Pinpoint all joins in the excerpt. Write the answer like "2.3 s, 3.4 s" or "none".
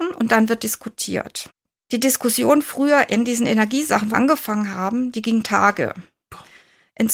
4.1 s